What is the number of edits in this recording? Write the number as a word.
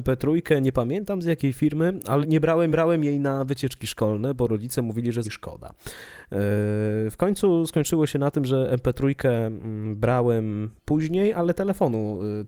four